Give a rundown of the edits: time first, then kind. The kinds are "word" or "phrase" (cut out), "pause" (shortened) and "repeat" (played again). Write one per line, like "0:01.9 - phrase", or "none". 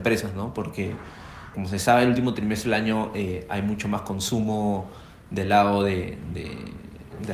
0:01.5 - word